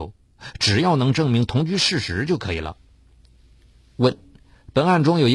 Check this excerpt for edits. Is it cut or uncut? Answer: uncut